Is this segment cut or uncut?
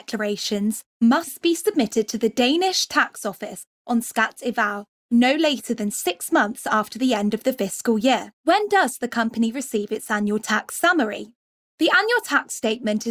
cut